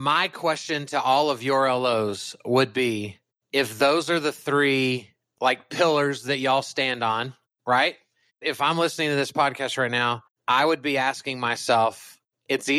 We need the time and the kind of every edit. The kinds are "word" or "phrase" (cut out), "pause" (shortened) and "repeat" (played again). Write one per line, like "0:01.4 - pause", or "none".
none